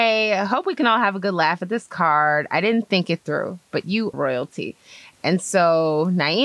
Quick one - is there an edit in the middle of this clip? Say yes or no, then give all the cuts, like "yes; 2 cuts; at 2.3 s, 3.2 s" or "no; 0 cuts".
yes; 1 cut; at 4.1 s